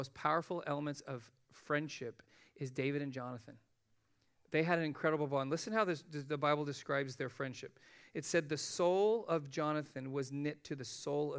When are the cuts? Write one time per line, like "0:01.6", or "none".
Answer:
none